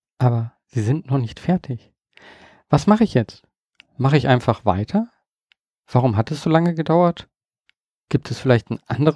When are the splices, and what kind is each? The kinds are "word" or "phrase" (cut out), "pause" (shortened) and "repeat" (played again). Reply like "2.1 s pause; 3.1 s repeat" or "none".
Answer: none